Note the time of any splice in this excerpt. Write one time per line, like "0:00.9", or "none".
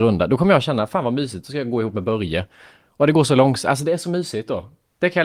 none

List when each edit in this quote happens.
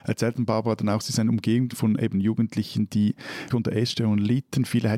0:01.7
0:03.5

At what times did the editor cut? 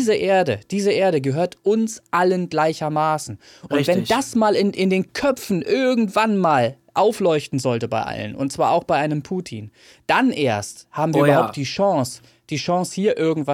none

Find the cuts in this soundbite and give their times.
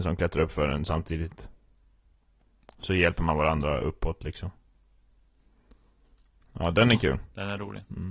none

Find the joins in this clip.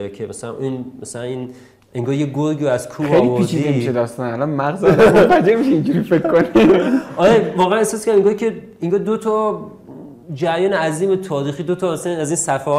0:10.2

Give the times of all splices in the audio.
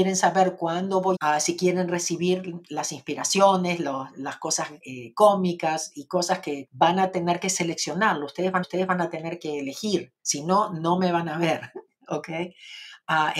0:01.2
0:04.8
0:06.7
0:08.6
0:10.2

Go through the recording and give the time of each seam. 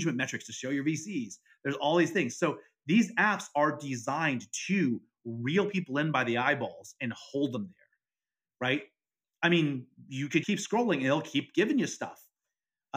0:10.4

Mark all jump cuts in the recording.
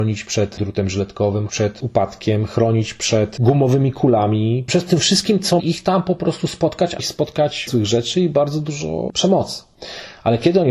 0:01.5
0:05.6
0:07.0
0:07.7

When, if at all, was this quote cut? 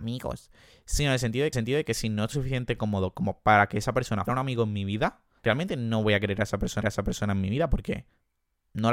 0:01.5
0:02.3
0:04.3
0:05.4
0:06.8

